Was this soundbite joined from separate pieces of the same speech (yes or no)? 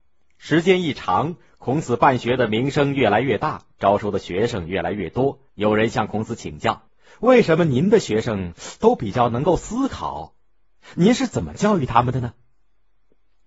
yes